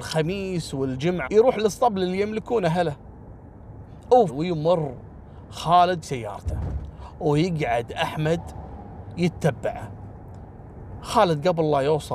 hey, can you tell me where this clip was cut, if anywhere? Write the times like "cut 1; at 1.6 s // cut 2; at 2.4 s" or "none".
cut 1; at 1.2 s // cut 2; at 4.3 s // cut 3; at 6.0 s